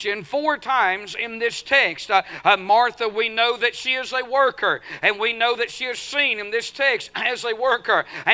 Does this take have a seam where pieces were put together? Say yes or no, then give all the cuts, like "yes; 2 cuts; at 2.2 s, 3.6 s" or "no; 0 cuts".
no; 0 cuts